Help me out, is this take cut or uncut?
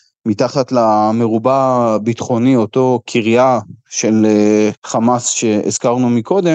cut